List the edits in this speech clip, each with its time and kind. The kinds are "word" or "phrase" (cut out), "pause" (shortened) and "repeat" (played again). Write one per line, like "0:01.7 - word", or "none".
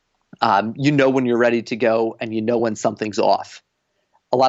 none

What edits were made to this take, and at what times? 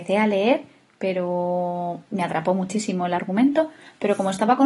none

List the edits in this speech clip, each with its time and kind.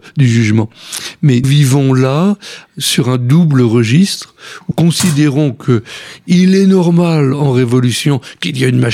0:01.4 - word
0:04.7 - word

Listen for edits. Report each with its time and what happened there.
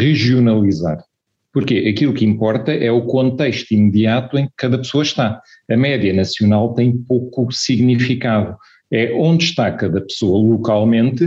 0:04.5 - word

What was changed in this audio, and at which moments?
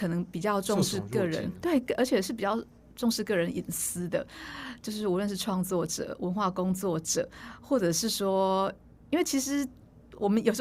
none

